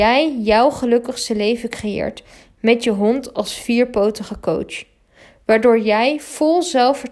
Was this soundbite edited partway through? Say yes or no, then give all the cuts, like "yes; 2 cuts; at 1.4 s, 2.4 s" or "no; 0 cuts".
no; 0 cuts